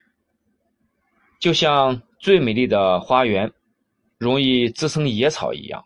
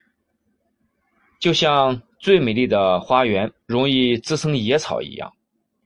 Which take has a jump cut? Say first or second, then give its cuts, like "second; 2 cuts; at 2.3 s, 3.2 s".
second; 1 cut; at 3.6 s